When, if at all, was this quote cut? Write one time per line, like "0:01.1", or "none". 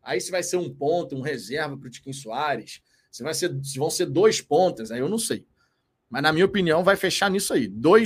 none